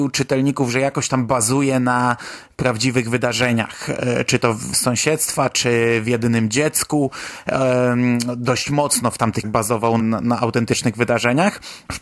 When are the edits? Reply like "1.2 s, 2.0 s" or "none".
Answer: 4.7 s, 9.4 s, 10.0 s